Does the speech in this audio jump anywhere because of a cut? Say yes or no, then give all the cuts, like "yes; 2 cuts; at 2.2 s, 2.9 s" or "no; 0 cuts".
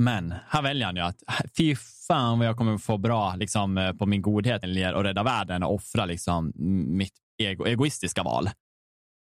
yes; 2 cuts; at 4.0 s, 4.6 s